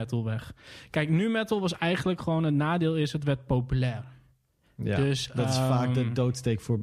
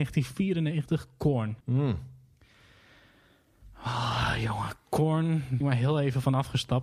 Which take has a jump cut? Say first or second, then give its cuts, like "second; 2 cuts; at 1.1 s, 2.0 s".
second; 2 cuts; at 1.6 s, 5.6 s